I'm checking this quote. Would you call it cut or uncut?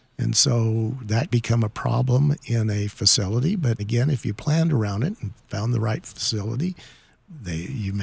cut